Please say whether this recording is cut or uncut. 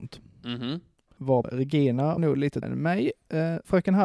cut